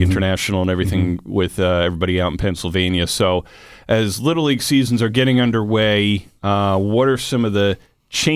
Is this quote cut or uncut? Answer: uncut